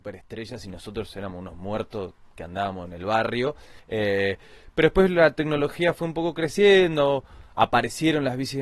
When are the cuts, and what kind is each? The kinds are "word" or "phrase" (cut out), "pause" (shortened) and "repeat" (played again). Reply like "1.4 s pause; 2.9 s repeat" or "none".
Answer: 3.8 s pause